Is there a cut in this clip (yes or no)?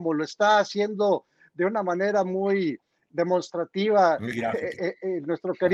no